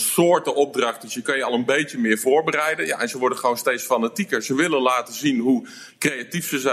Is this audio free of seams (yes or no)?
yes